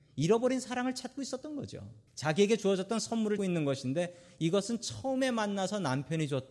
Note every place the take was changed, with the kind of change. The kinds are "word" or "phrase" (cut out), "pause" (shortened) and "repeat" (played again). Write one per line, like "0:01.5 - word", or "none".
0:02.1 - pause
0:03.4 - word